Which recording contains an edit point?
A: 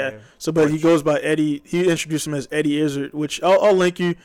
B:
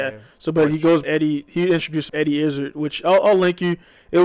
B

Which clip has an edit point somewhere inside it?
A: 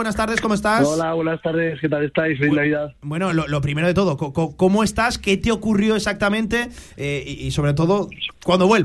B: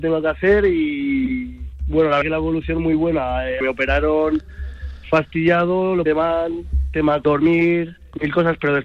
B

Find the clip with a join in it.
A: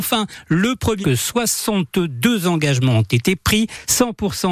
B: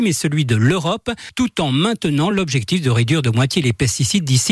A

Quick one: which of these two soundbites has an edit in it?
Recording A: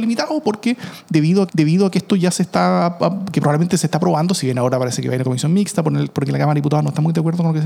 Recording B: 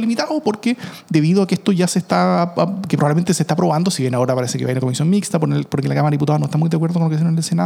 A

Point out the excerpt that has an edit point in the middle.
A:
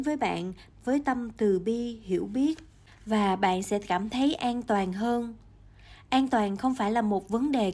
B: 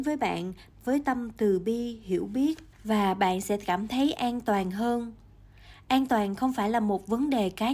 B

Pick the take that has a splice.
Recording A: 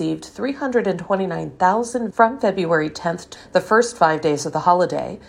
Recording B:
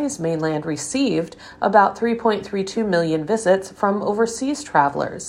A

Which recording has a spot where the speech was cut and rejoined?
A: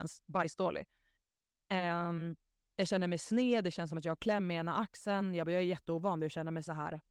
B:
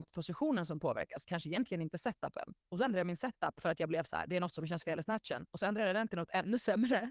B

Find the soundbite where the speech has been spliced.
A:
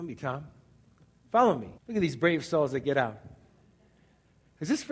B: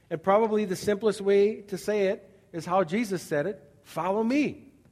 A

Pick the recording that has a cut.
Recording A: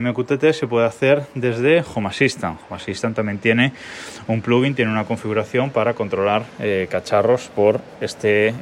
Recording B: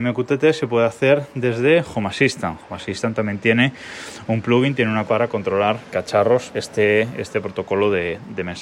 B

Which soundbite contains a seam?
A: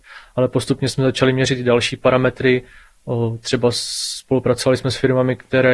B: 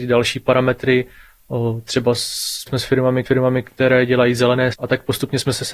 B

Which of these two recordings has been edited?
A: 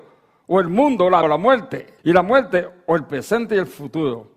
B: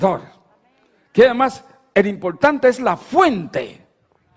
A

